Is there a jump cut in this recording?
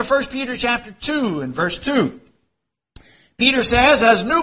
no; 0 cuts

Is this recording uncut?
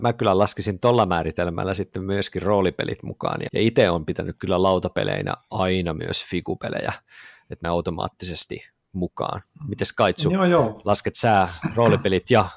no; 2 cuts; at 3.5 s, 7.6 s

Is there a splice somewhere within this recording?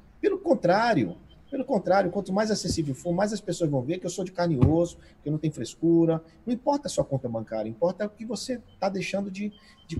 no; 0 cuts

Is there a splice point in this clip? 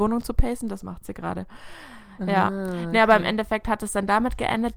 no; 0 cuts

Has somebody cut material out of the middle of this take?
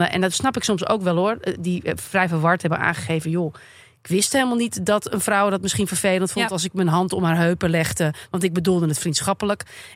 no; 0 cuts

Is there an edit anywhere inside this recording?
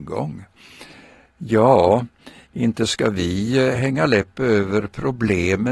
no; 0 cuts

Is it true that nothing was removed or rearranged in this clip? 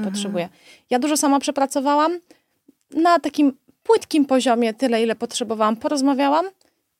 yes; 0 cuts

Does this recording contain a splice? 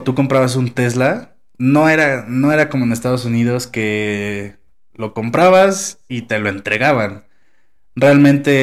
no; 0 cuts

